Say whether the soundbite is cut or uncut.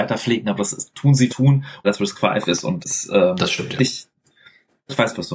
cut